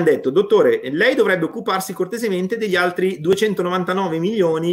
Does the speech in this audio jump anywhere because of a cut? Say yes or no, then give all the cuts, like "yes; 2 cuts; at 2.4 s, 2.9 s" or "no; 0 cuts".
no; 0 cuts